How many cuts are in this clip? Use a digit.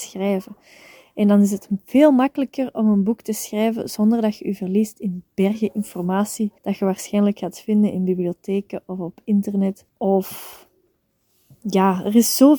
2